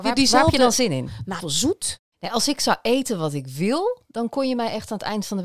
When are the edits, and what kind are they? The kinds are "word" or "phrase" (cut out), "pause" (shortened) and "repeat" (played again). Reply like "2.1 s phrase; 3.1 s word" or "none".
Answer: 1.4 s phrase